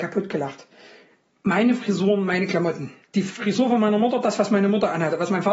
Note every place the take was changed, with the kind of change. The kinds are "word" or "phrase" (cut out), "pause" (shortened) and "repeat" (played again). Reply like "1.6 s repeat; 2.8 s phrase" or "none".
3.0 s pause